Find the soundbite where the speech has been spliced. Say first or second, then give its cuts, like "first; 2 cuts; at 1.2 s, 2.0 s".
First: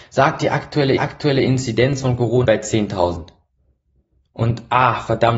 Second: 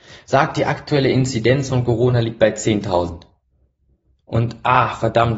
first; 2 cuts; at 1.0 s, 2.4 s